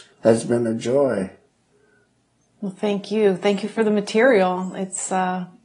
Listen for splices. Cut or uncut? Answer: uncut